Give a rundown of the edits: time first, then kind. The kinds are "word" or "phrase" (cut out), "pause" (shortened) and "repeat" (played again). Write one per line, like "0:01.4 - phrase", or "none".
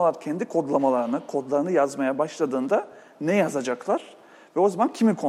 none